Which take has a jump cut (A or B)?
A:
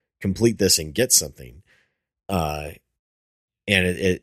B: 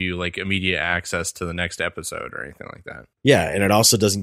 B